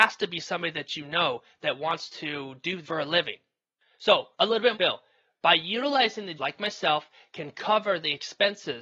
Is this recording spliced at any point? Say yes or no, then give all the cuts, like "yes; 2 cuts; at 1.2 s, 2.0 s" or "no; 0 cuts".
yes; 4 cuts; at 2.8 s, 4.3 s, 4.7 s, 6.4 s